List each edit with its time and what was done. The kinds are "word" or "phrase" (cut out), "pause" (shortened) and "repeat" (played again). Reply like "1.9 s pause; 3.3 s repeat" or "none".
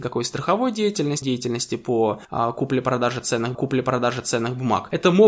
1.2 s word; 3.5 s repeat